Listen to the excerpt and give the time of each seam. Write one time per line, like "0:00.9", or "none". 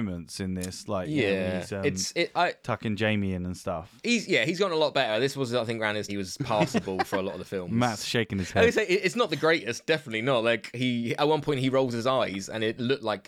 0:06.1